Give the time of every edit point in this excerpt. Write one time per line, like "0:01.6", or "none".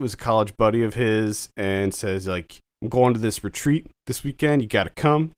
none